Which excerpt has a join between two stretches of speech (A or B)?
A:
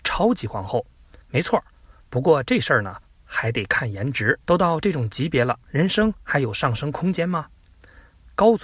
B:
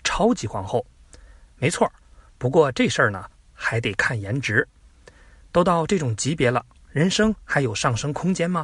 A